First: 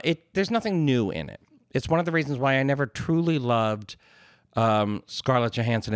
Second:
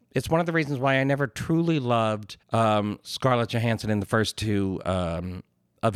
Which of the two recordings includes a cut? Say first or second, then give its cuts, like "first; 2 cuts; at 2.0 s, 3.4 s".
second; 1 cut; at 2.4 s